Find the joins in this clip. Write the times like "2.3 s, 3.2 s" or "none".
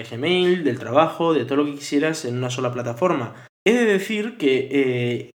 3.5 s